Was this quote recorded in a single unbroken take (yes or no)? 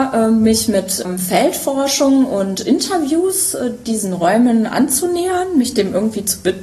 yes